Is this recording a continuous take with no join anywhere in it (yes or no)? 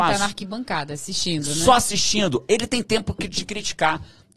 yes